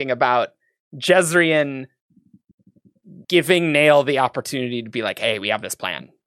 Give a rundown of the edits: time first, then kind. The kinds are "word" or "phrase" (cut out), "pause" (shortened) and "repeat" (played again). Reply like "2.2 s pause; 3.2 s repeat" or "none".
3.2 s pause